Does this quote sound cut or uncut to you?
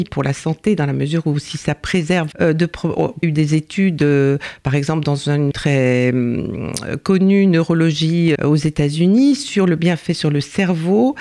cut